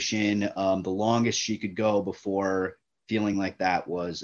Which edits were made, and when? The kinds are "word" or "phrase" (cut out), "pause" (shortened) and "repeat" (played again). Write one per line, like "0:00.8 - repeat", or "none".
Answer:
none